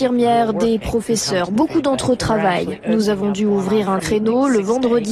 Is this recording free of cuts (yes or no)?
no